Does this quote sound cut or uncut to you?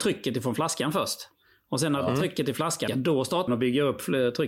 cut